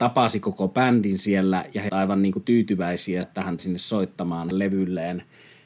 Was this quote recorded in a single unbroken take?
no; 4 cuts; at 1.9 s, 3.2 s, 3.6 s, 4.5 s

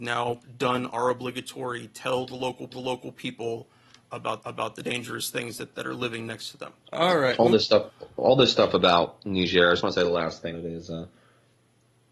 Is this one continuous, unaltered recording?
no; 4 cuts; at 2.7 s, 4.4 s, 6.8 s, 10.5 s

